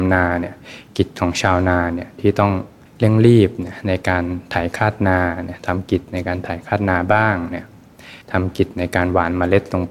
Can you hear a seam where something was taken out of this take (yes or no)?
yes